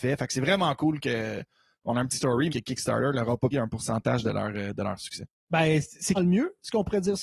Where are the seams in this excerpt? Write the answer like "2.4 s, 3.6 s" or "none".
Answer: 2.2 s, 2.5 s, 3.5 s, 6.1 s